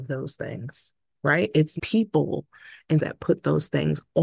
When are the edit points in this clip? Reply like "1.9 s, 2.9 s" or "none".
1.8 s, 3.0 s